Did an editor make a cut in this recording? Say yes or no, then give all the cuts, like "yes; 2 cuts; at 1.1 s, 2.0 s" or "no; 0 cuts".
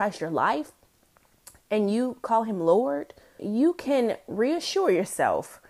yes; 1 cut; at 3.4 s